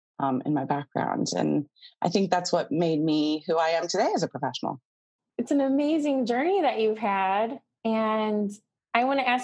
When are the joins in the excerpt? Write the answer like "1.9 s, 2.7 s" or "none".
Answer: none